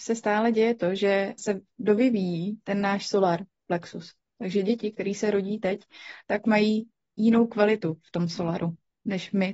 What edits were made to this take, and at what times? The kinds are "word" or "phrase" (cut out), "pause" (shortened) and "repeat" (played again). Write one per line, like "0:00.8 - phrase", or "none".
0:01.4 - word
0:06.4 - word